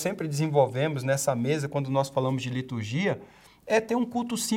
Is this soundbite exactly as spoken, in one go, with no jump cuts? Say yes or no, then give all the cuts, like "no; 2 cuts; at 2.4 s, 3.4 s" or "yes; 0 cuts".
yes; 0 cuts